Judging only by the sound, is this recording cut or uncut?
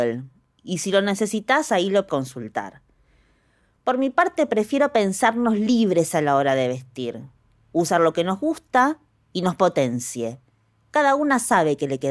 cut